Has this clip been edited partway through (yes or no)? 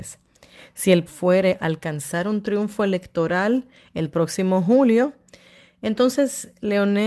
yes